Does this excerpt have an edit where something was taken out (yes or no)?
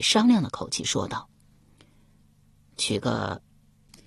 no